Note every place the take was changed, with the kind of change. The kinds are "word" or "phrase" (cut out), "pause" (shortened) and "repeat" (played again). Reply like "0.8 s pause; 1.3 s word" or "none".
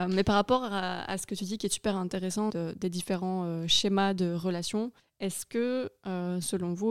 2.5 s word; 5.0 s pause